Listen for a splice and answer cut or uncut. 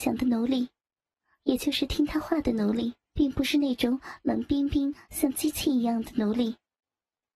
cut